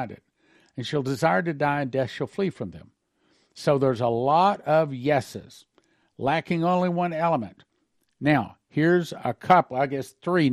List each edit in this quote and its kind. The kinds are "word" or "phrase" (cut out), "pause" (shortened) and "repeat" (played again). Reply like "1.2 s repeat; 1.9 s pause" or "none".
none